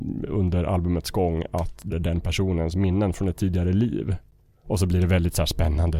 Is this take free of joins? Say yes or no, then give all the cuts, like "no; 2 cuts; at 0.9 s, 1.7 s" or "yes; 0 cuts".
no; 1 cut; at 1.9 s